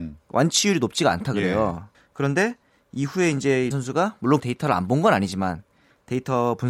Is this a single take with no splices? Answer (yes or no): no